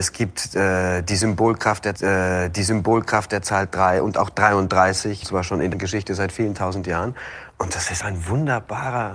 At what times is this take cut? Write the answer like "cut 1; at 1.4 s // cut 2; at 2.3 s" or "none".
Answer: cut 1; at 2.0 s // cut 2; at 5.2 s // cut 3; at 5.7 s // cut 4; at 8.0 s